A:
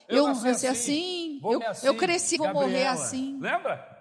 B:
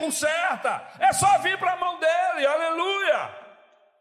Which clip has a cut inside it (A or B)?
A